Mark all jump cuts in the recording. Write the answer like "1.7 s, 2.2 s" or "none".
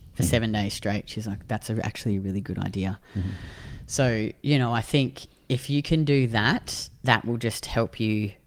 none